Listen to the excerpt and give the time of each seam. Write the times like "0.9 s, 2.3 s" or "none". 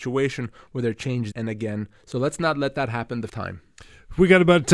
1.3 s, 3.3 s